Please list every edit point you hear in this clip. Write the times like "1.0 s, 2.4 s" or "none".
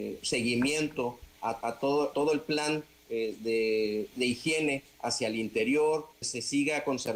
1.6 s, 2.1 s, 4.1 s, 6.2 s